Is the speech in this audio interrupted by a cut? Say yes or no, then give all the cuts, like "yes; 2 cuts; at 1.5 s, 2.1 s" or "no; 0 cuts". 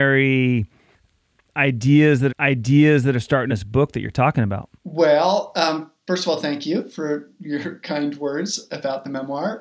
yes; 3 cuts; at 2.3 s, 3.5 s, 4.7 s